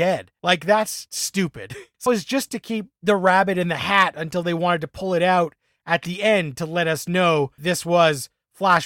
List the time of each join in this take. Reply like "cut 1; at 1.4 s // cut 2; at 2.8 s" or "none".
cut 1; at 2.1 s // cut 2; at 7.6 s